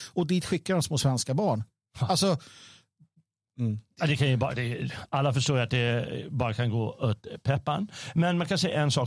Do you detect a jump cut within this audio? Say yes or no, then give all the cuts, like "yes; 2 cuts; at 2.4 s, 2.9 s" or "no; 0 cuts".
no; 0 cuts